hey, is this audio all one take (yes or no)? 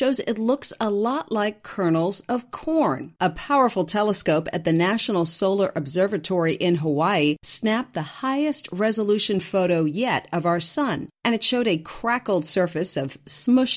no